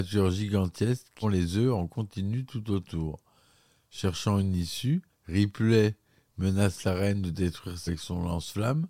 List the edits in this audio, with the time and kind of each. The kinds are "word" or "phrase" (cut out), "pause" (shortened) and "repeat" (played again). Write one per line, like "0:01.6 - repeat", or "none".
0:01.2 - word
0:05.1 - pause
0:07.9 - word